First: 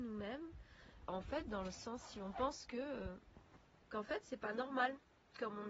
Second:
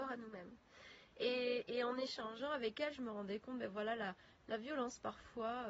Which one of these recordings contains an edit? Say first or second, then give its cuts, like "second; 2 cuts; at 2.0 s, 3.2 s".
first; 2 cuts; at 1.1 s, 3.7 s